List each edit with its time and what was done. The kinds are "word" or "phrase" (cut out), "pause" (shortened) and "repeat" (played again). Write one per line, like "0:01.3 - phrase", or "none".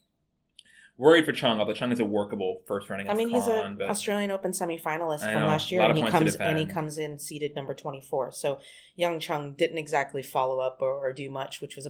none